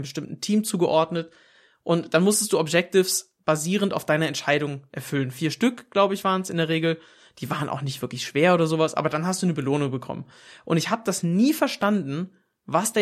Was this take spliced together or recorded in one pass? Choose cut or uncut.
uncut